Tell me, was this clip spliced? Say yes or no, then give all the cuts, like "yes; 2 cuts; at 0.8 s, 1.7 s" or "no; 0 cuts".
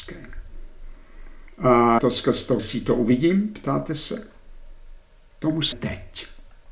yes; 3 cuts; at 2.0 s, 2.6 s, 5.7 s